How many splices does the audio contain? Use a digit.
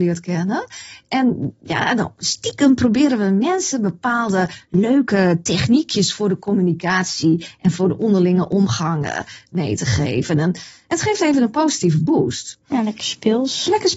0